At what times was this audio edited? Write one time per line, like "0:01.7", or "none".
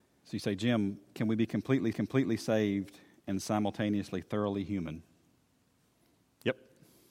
0:01.9